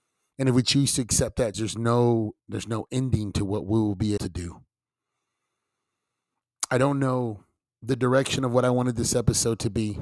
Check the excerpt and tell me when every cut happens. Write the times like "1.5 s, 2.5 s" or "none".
1.5 s, 2.4 s, 4.2 s, 7.7 s